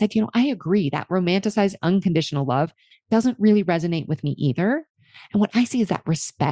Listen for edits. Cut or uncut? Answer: uncut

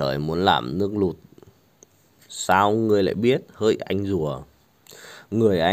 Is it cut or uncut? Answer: uncut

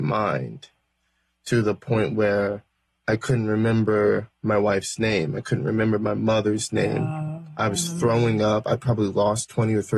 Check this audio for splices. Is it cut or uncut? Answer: uncut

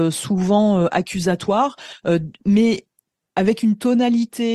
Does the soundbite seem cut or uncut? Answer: uncut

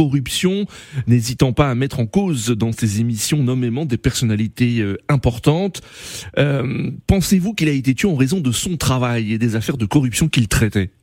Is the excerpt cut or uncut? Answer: uncut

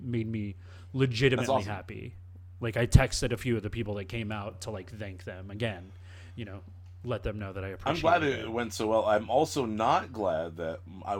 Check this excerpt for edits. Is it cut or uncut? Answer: uncut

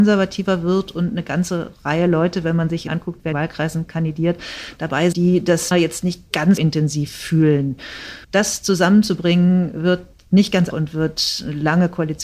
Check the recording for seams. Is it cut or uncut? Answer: cut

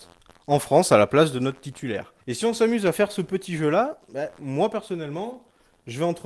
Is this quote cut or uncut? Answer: cut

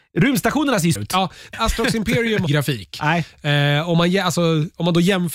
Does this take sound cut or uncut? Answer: cut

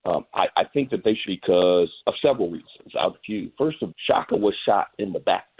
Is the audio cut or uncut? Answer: cut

